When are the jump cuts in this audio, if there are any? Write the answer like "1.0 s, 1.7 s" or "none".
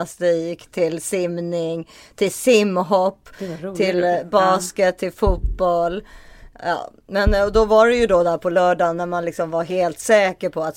none